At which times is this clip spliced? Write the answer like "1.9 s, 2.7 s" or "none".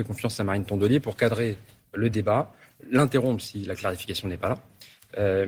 none